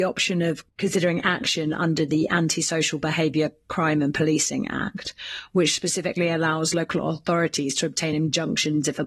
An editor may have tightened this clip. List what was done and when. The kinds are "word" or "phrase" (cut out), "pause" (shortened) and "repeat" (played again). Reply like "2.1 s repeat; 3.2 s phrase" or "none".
none